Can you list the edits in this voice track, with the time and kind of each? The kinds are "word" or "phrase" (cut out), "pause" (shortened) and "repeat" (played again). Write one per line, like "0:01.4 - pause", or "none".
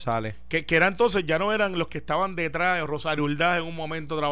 none